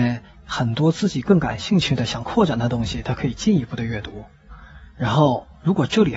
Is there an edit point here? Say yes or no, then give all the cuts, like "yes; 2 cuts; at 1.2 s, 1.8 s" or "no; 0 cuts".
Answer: no; 0 cuts